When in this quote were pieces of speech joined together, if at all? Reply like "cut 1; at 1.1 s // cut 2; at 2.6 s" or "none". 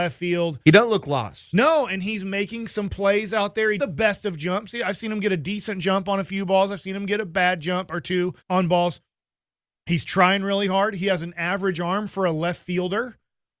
cut 1; at 3.8 s // cut 2; at 8.4 s